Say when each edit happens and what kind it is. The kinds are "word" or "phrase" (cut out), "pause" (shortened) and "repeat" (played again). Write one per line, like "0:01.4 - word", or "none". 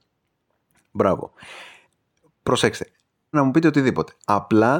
0:03.3 - word